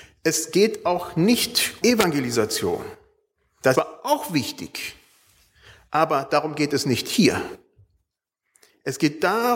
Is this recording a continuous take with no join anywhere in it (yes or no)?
no